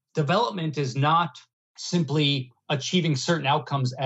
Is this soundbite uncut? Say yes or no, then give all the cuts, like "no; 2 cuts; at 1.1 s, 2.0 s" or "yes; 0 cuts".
no; 1 cut; at 1.5 s